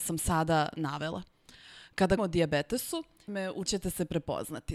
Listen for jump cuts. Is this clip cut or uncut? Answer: cut